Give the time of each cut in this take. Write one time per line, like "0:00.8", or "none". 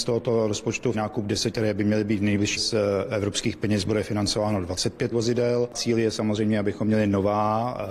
0:00.9
0:01.5
0:02.6
0:05.1
0:05.7